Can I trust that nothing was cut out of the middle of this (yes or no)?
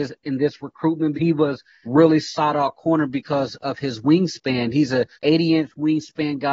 no